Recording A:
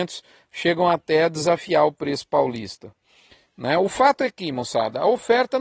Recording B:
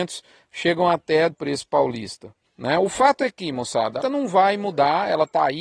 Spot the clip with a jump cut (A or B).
B